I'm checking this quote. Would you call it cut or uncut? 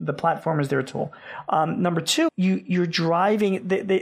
cut